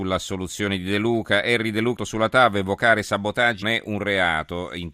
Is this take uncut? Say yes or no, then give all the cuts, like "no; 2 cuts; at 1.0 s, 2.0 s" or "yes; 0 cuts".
no; 2 cuts; at 2.0 s, 3.6 s